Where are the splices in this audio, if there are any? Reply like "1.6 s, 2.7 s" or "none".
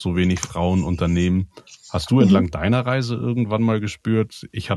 none